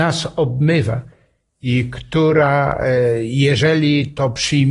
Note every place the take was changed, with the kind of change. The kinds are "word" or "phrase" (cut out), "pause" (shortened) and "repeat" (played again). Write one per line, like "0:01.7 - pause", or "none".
none